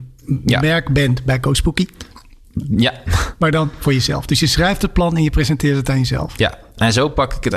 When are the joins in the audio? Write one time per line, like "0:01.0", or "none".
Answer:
none

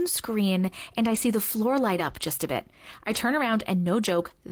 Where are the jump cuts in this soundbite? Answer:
none

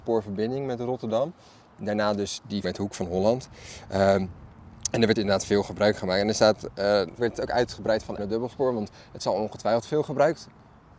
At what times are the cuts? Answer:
0:02.6
0:05.2
0:07.2
0:08.2

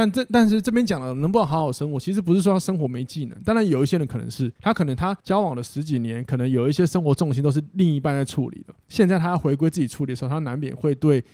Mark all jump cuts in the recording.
0:04.6
0:05.2
0:08.8

